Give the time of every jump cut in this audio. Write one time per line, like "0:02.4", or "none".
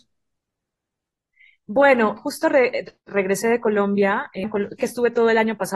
0:02.2
0:04.4
0:04.8